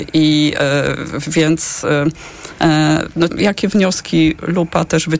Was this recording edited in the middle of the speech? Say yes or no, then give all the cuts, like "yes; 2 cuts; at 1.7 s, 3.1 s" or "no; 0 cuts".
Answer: yes; 1 cut; at 3.3 s